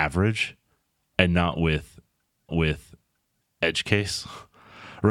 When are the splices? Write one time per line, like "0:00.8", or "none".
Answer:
0:02.5